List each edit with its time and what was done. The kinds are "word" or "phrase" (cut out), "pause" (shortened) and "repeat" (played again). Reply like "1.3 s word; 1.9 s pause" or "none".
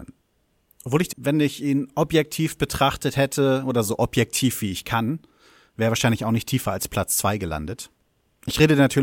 1.1 s word